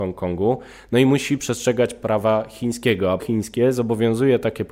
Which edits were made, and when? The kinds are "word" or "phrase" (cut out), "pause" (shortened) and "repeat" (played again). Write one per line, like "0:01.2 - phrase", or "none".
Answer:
0:03.2 - word